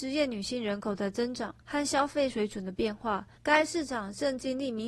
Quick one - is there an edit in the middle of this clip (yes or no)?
yes